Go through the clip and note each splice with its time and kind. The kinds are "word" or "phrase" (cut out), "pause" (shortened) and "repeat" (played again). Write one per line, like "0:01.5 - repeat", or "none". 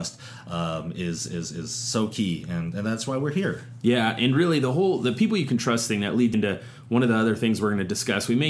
0:01.3 - word
0:06.3 - word